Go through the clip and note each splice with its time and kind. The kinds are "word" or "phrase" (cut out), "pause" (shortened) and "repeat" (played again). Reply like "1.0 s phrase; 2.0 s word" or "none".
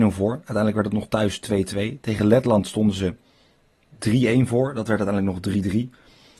none